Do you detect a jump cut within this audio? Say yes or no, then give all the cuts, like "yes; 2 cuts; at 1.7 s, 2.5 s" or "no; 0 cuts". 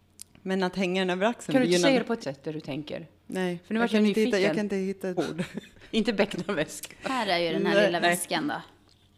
yes; 3 cuts; at 2.2 s, 3.2 s, 5.2 s